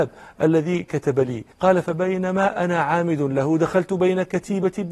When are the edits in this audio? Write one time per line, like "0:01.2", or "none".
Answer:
0:01.5